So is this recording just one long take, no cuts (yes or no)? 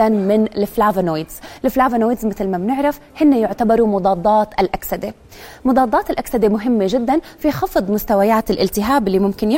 yes